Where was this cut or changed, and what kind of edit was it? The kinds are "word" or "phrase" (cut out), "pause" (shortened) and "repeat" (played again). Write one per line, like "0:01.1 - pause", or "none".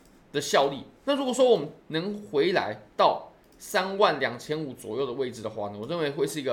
0:01.0 - pause
0:01.8 - pause
0:02.9 - pause